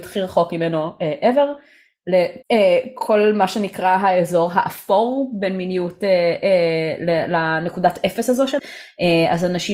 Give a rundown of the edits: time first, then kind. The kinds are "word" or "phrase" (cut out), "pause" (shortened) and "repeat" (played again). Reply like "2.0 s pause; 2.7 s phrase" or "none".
2.4 s pause; 8.6 s word

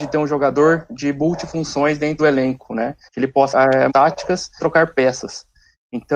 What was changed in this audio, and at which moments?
2.2 s word; 3.1 s pause; 3.5 s word; 3.9 s phrase; 4.6 s word

